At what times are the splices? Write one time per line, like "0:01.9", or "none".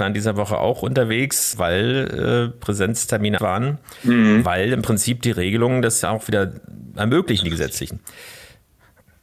0:01.5
0:03.4